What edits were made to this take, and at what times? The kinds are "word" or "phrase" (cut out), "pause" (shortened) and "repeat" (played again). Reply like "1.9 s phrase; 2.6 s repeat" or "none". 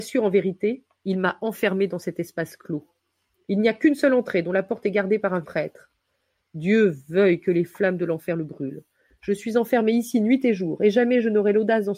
0.9 s pause; 5.4 s word